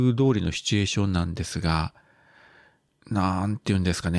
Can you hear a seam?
no; 0 cuts

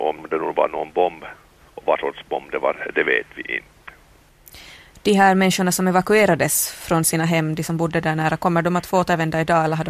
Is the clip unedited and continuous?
yes; 0 cuts

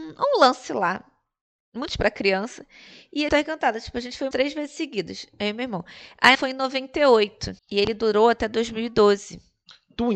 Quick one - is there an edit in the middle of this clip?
yes; 5 cuts; at 2.0 s, 3.3 s, 4.3 s, 6.3 s, 7.6 s

